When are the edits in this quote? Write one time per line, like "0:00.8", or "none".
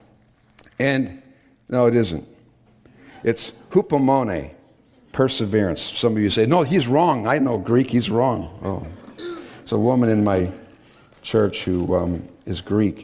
none

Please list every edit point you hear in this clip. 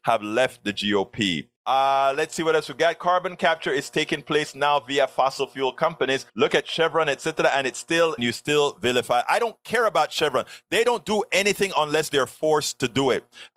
0:01.5
0:06.3
0:08.2

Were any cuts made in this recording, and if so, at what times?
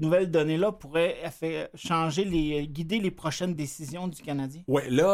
none

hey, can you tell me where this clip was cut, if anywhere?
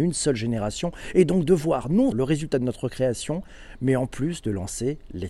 0:02.1

